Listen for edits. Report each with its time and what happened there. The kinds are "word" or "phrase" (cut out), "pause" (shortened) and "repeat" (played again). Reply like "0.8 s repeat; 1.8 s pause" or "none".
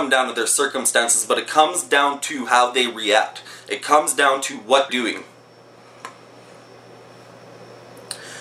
4.9 s word